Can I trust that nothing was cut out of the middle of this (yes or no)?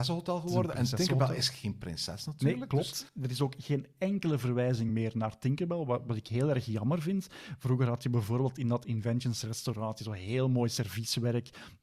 yes